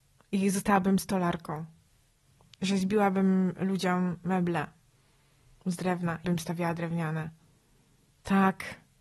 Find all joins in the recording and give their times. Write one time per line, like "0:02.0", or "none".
0:06.2